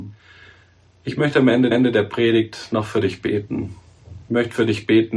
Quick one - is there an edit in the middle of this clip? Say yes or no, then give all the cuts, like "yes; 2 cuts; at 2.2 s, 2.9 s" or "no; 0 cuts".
yes; 1 cut; at 1.7 s